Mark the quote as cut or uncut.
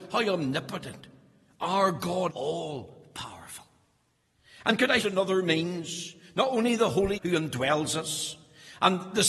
cut